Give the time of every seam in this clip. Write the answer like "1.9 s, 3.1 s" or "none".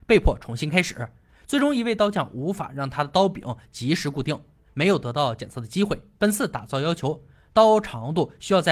6.2 s

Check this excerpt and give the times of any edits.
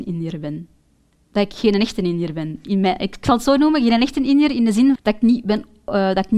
5.0 s

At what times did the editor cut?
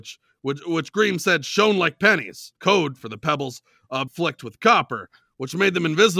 2.6 s, 4.1 s

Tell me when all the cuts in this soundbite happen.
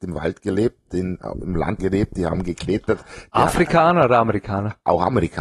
1.8 s

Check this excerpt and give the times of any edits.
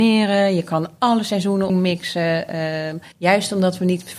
1.7 s, 3.1 s

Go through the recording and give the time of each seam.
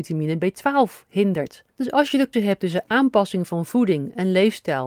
1.7 s, 2.3 s

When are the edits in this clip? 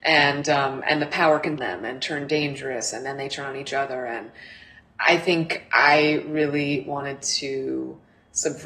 1.6 s

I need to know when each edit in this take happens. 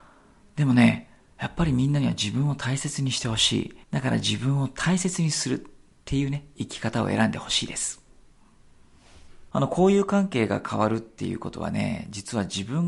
3.8 s

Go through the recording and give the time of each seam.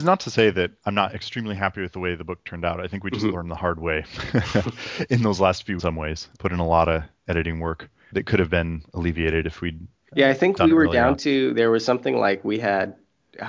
5.8 s, 6.3 s, 8.1 s

